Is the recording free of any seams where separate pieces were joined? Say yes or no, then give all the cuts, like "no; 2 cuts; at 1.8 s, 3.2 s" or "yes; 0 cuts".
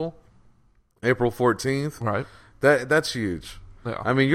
yes; 0 cuts